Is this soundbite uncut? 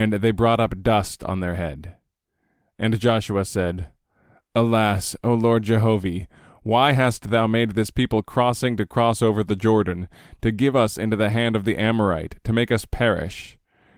yes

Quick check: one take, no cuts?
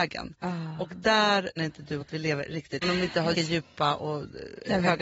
no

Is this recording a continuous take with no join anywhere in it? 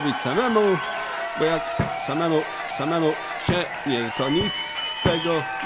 no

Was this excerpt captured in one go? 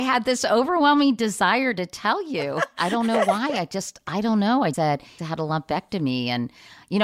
no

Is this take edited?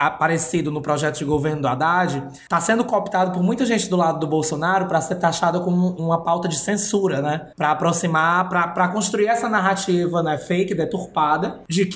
yes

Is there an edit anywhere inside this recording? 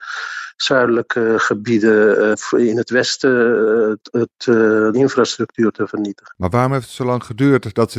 yes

